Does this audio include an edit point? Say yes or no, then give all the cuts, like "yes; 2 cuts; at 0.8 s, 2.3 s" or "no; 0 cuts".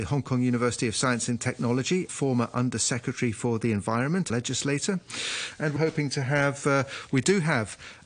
yes; 3 cuts; at 2.1 s, 4.3 s, 5.8 s